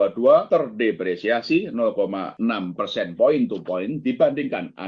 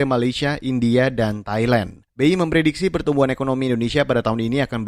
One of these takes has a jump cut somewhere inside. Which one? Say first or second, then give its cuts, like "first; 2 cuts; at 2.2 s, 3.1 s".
second; 1 cut; at 2.1 s